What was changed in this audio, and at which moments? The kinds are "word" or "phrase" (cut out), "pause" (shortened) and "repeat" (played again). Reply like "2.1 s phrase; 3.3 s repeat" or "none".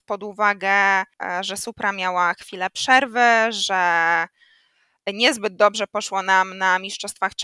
none